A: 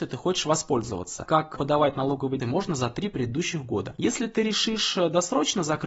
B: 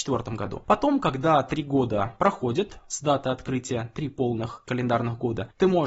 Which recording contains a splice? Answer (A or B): A